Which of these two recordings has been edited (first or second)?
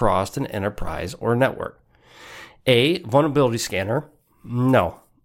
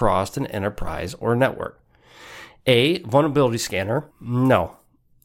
second